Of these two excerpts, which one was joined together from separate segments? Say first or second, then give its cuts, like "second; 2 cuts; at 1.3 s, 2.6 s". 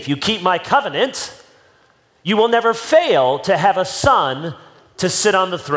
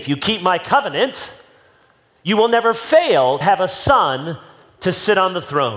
second; 1 cut; at 3.4 s